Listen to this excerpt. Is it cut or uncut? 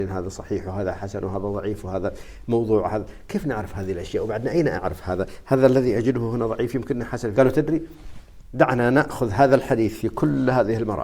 cut